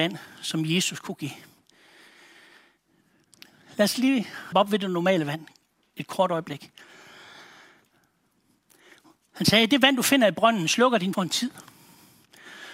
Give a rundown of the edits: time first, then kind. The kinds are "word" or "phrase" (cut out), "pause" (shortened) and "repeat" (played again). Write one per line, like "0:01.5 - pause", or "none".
0:04.5 - word
0:11.1 - word